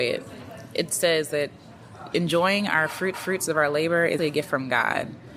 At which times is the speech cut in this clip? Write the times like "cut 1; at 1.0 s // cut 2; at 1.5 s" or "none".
cut 1; at 3.1 s // cut 2; at 4.2 s